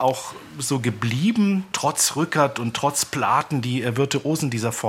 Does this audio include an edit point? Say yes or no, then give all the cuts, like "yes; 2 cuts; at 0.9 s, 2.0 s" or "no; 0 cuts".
no; 0 cuts